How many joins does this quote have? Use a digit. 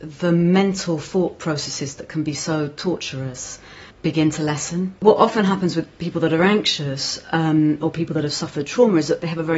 2